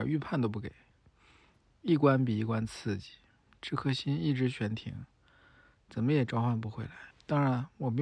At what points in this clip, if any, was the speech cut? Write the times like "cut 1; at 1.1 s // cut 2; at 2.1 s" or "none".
cut 1; at 7.1 s